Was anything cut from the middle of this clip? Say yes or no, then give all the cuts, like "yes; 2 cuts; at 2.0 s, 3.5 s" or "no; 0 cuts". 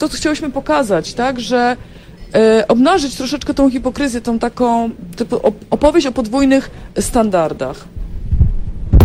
no; 0 cuts